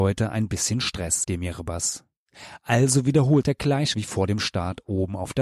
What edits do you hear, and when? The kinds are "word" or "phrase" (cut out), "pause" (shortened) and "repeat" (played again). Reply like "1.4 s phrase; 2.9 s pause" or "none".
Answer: 1.2 s word; 3.4 s word; 3.9 s word

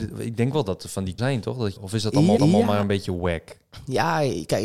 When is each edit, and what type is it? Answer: 1.2 s word; 1.8 s word; 2.4 s repeat

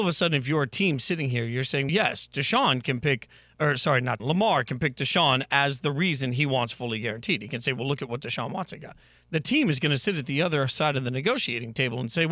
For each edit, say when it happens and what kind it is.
1.9 s word; 4.2 s word

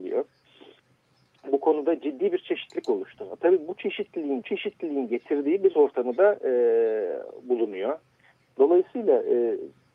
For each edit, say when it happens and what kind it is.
4.4 s repeat; 5.7 s word

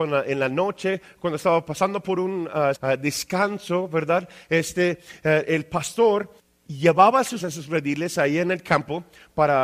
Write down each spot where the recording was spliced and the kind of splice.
2.7 s word; 6.4 s pause; 7.4 s word

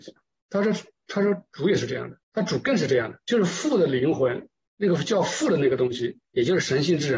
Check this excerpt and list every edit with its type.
2.2 s pause; 3.2 s pause; 6.2 s pause

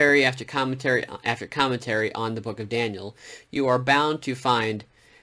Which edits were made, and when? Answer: none

